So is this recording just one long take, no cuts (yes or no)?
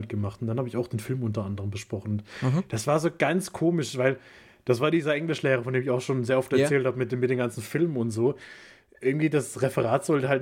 yes